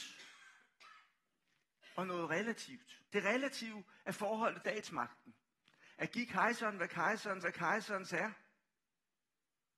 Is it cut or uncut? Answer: cut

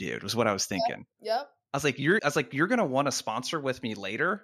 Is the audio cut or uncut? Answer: cut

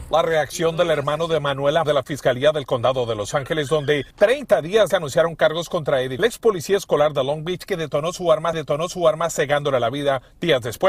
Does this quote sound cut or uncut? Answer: cut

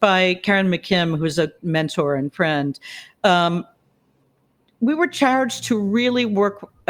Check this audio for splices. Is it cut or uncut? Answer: cut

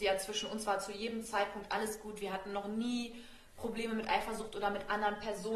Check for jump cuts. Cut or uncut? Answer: uncut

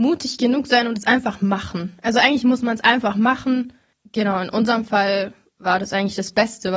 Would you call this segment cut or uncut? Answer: uncut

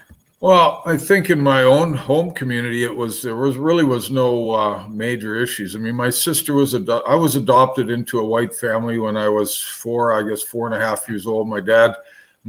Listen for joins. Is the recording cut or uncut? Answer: uncut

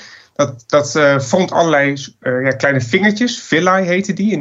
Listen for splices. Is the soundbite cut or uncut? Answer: uncut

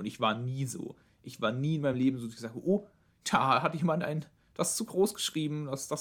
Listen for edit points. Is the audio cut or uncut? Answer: uncut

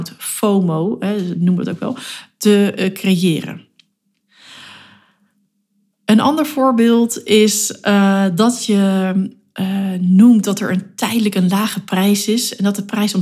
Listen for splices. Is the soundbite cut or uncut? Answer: uncut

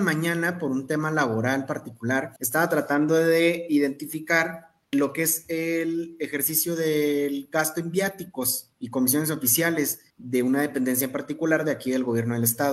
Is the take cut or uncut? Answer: cut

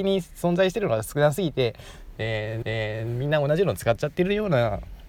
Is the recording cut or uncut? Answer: cut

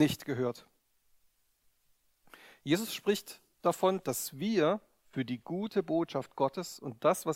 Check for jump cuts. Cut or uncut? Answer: uncut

